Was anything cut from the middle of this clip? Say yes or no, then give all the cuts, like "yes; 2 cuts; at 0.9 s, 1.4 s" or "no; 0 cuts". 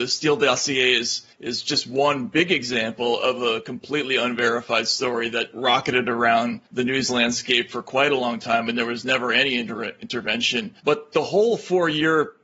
yes; 3 cuts; at 1.3 s, 6.7 s, 10.8 s